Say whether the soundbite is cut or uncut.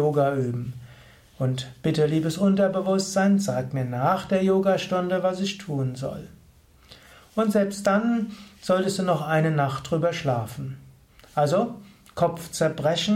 uncut